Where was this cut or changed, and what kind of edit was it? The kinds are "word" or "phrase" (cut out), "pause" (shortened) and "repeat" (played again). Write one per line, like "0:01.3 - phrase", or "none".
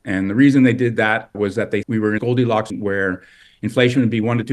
0:01.3 - word
0:01.8 - word
0:02.2 - word
0:02.7 - word